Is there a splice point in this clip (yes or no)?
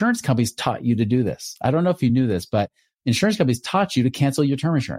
no